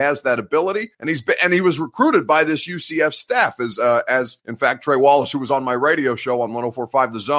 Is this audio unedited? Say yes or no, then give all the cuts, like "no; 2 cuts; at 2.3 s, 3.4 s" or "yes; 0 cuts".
no; 2 cuts; at 0.9 s, 4.4 s